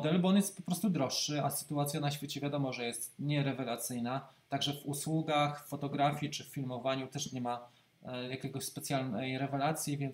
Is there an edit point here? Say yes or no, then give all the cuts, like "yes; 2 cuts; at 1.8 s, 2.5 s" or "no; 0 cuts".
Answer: no; 0 cuts